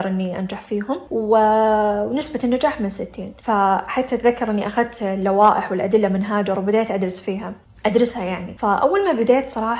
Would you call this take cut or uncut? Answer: uncut